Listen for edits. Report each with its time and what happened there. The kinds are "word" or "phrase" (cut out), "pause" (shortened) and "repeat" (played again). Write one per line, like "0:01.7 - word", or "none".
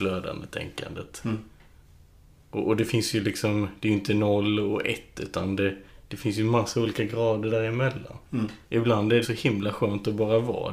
0:01.8 - pause
0:08.6 - pause
0:09.2 - phrase

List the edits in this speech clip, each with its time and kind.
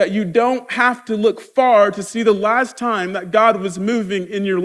none

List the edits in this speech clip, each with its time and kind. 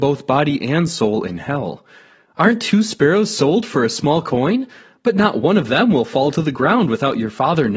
none

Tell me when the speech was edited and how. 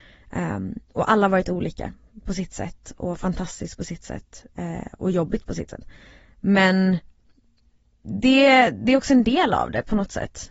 none

